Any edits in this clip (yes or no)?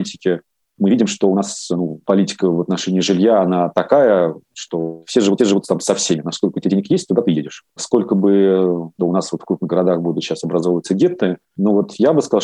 yes